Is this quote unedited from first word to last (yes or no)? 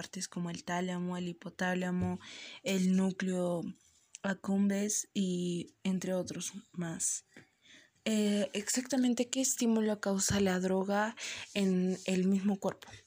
yes